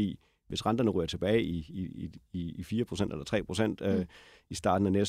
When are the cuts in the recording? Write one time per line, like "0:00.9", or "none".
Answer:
none

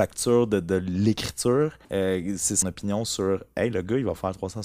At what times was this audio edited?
0:01.8
0:02.6

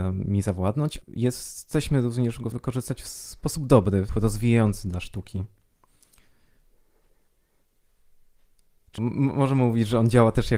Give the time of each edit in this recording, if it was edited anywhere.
0:01.0
0:02.5
0:04.1
0:09.0

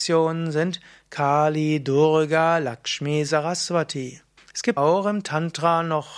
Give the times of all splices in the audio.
0:04.4
0:04.8

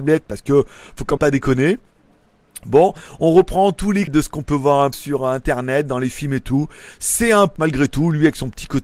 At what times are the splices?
0:01.2
0:04.1
0:04.9
0:07.6

